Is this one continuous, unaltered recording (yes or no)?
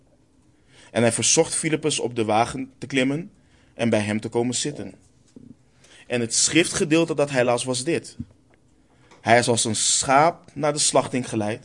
yes